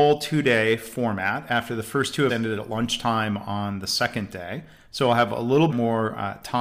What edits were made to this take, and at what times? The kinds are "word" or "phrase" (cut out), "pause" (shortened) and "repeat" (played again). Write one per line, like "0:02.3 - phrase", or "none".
0:02.3 - word
0:05.7 - word